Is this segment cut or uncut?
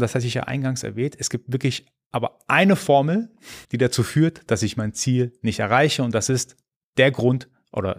cut